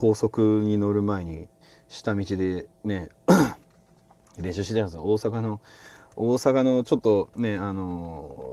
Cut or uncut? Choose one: uncut